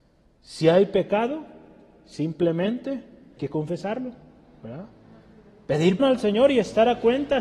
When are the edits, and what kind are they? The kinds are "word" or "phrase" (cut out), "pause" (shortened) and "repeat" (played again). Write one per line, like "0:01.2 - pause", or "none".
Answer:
0:03.4 - word
0:06.0 - word

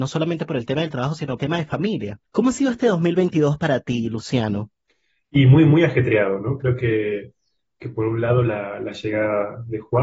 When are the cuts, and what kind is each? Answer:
0:01.4 - phrase

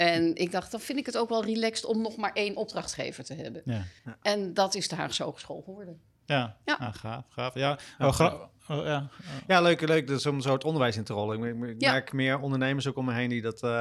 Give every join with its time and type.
0:04.0 - pause

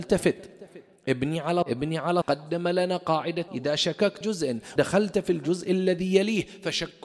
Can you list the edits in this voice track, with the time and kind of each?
0:01.6 - word
0:02.2 - word
0:03.5 - word
0:04.2 - word
0:04.8 - word

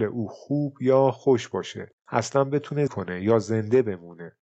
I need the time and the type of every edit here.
0:02.0 - pause
0:02.9 - word

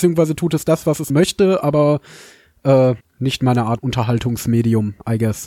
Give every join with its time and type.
0:01.1 - word
0:03.0 - pause
0:03.8 - word

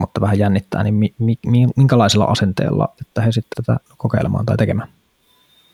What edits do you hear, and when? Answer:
0:03.0 - word
0:03.5 - word
0:03.9 - pause

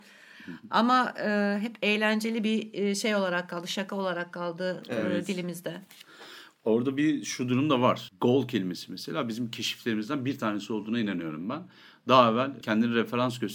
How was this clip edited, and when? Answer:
none

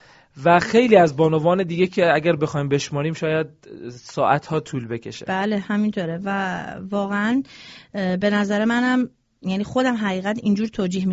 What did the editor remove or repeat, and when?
none

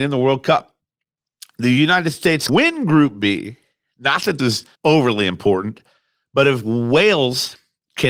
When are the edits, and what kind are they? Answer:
0:02.5 - word
0:04.4 - word
0:04.7 - pause

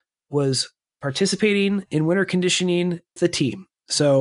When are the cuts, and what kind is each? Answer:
0:03.2 - word

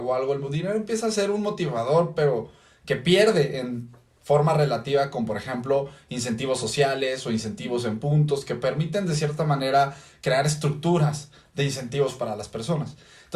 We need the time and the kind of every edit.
none

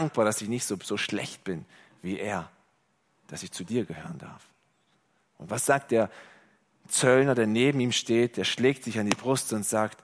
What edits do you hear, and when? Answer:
none

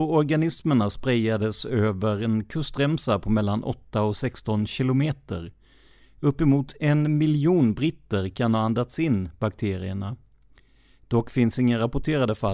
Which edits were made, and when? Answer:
none

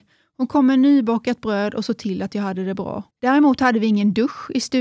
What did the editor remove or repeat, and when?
0:03.1 - pause

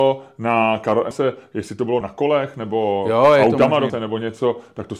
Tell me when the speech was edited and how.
0:01.1 - phrase
0:02.0 - word
0:03.9 - word

